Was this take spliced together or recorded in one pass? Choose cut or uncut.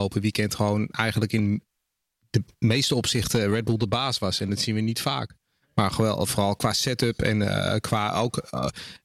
uncut